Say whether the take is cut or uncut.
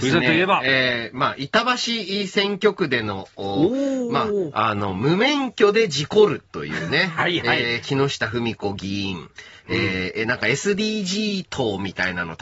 uncut